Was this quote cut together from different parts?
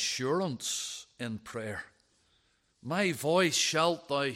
no; 0 cuts

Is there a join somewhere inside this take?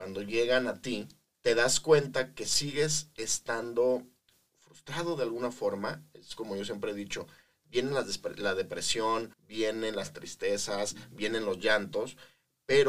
yes; 2 cuts; at 1.3 s, 9.3 s

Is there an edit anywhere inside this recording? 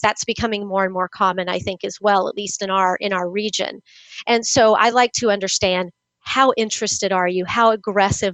no; 0 cuts

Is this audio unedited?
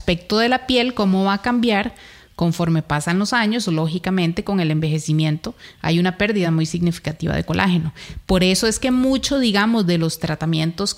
yes; 0 cuts

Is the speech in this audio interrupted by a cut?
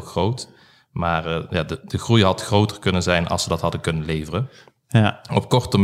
no; 0 cuts

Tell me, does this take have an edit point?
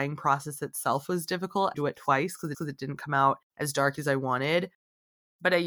yes; 3 cuts; at 1.7 s, 2.5 s, 3.5 s

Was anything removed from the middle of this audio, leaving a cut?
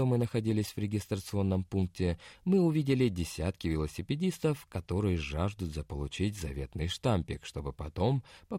no; 0 cuts

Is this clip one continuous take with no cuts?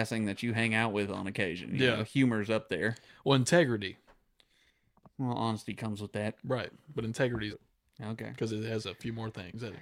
no; 1 cut; at 7.5 s

